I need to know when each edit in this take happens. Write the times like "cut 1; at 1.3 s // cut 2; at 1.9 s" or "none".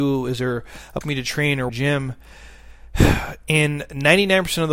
cut 1; at 1.0 s // cut 2; at 1.7 s